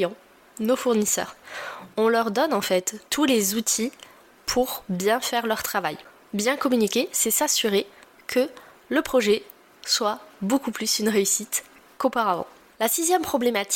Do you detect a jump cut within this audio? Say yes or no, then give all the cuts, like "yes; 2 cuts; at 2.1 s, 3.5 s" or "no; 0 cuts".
no; 0 cuts